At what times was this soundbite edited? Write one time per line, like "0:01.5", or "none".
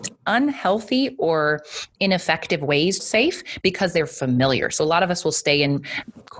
0:02.0
0:03.0

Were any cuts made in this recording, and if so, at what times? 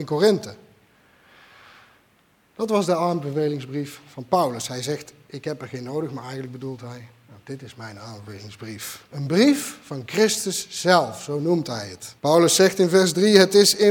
0:12.2

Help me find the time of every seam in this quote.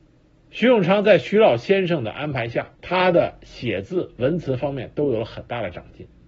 0:02.8

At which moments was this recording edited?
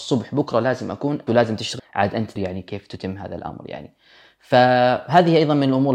0:01.3
0:01.8
0:02.4

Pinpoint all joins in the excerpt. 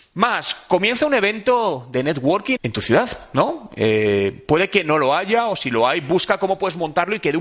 0:02.6

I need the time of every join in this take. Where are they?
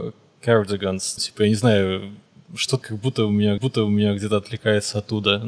0:01.2
0:02.8
0:03.6

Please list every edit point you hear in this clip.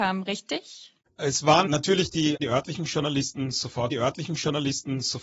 0:01.1
0:01.7
0:02.4
0:03.9

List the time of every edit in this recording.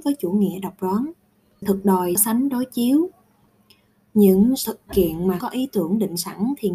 0:01.6
0:02.2
0:04.9
0:05.4

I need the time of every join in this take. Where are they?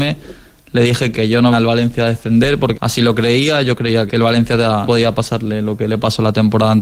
0:01.1
0:01.5
0:02.7
0:04.1
0:04.9

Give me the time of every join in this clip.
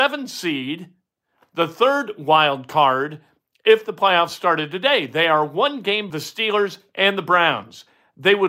0:06.1

